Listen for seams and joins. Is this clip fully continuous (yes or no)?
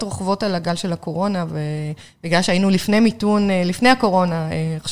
yes